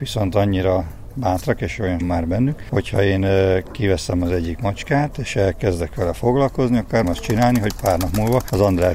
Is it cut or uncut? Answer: cut